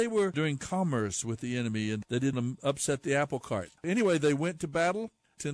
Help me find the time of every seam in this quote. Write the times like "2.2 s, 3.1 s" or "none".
2.3 s, 3.8 s